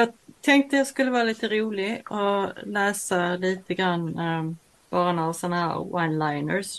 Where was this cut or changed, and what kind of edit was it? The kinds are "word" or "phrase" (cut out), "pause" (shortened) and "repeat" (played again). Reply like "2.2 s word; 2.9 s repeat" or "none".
none